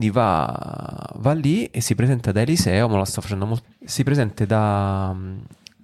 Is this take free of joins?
no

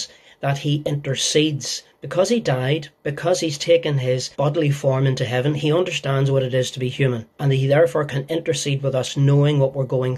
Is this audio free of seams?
no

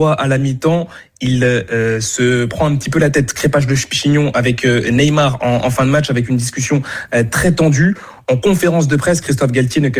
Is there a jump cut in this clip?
no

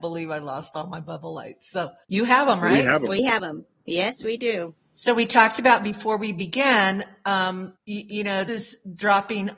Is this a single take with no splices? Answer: no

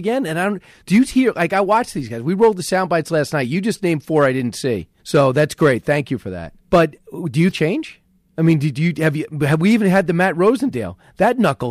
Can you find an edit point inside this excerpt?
yes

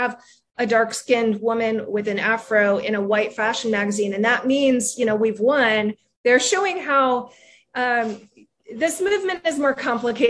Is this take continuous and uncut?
yes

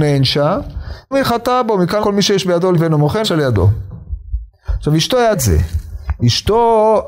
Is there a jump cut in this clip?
yes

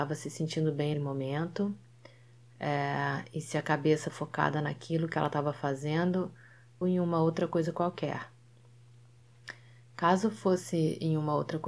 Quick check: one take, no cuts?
no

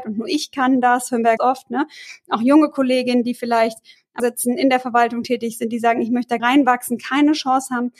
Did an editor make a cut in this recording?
yes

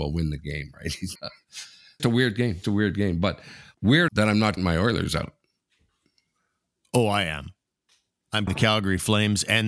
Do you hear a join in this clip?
yes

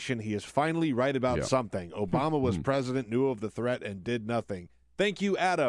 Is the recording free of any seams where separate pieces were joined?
yes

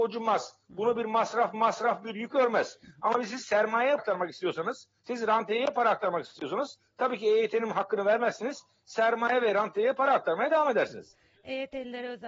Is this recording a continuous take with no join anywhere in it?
no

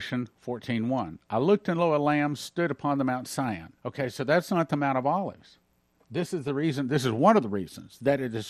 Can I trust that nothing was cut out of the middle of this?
no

